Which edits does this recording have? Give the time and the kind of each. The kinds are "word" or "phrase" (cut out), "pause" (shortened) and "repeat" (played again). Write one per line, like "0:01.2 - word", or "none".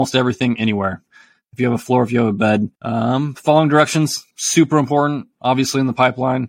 0:02.8 - pause
0:04.3 - pause